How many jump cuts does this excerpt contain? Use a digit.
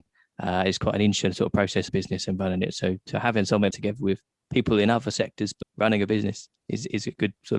3